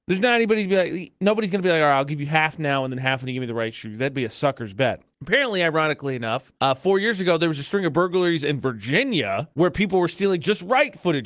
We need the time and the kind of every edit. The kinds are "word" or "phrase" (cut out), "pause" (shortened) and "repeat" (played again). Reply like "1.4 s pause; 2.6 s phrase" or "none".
5.1 s pause; 6.6 s pause; 9.5 s pause